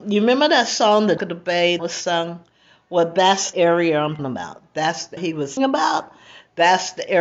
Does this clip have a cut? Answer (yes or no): yes